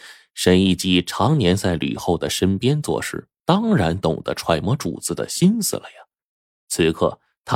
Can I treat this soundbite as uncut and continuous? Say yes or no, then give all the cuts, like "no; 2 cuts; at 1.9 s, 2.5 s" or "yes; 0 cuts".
yes; 0 cuts